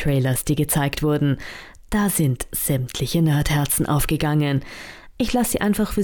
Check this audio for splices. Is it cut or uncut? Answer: uncut